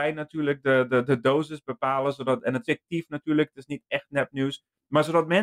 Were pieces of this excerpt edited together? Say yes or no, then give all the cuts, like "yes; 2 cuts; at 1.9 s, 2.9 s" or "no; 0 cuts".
yes; 1 cut; at 2.6 s